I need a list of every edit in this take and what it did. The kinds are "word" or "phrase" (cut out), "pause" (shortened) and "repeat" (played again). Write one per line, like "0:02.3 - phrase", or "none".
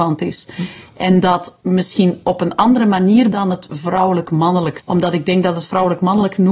0:01.6 - pause
0:03.3 - word
0:04.8 - word